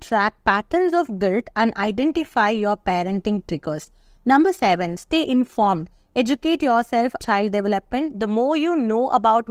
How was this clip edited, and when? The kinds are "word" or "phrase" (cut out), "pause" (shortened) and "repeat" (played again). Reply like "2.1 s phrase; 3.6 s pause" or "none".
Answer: 7.2 s word

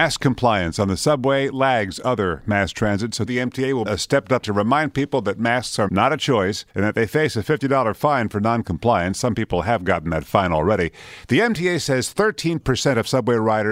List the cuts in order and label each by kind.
3.3 s word; 3.9 s word; 4.4 s word; 5.9 s word; 6.7 s pause

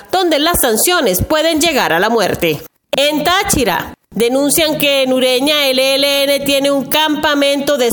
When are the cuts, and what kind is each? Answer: none

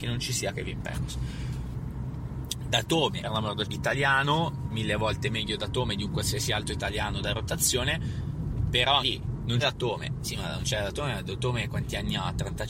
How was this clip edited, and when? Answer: 3.2 s phrase; 3.6 s word; 9.0 s word; 9.6 s word

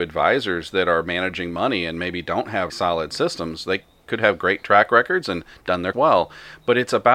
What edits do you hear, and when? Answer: 2.7 s word; 5.9 s word

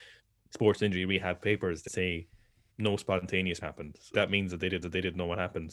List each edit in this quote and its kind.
1.9 s word; 2.7 s phrase; 3.6 s word; 4.1 s word; 4.8 s repeat

